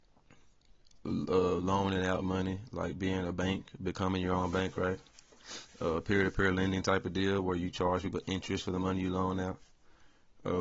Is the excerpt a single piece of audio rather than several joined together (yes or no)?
yes